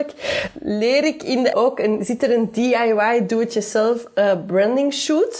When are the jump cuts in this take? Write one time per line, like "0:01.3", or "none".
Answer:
0:01.5